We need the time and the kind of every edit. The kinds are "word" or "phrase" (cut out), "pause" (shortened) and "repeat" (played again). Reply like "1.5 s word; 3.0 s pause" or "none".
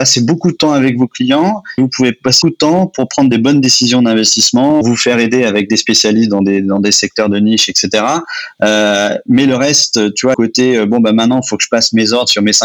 1.8 s word; 2.4 s word; 4.8 s phrase; 10.3 s phrase